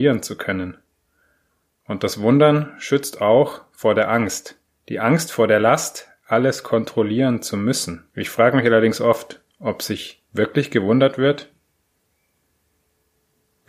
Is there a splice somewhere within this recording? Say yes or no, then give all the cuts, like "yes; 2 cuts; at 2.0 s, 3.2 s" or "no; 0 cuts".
yes; 2 cuts; at 4.7 s, 8.1 s